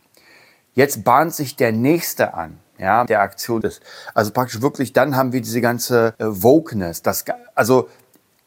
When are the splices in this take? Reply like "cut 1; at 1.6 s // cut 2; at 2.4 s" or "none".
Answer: cut 1; at 3.1 s // cut 2; at 3.6 s // cut 3; at 6.1 s